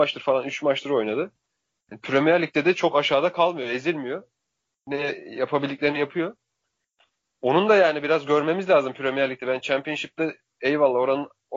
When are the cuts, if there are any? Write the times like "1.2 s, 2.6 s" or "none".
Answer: none